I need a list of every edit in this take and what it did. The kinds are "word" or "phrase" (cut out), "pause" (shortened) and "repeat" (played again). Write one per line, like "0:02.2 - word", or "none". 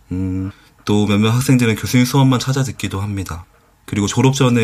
none